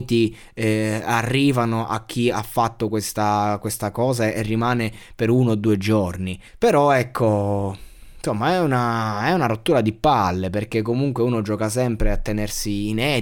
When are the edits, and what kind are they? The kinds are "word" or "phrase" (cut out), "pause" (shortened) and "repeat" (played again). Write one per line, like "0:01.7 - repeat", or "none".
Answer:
0:06.5 - pause